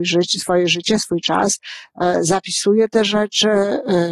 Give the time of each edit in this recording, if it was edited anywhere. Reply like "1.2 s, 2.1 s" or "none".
none